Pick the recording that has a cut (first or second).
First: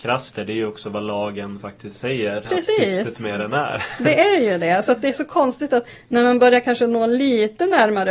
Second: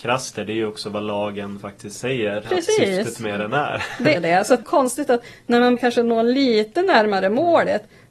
second